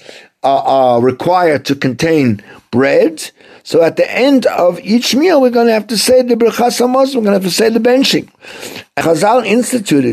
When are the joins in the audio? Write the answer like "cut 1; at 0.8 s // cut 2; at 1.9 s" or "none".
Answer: cut 1; at 9.0 s